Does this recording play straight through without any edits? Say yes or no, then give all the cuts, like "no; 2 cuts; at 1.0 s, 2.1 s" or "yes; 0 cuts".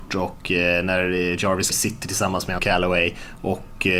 no; 2 cuts; at 1.7 s, 2.6 s